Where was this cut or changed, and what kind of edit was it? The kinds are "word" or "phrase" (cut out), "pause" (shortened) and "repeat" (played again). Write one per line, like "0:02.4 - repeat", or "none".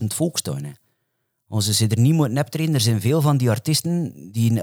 none